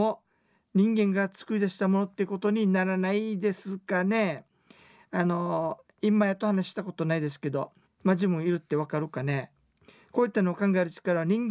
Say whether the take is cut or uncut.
cut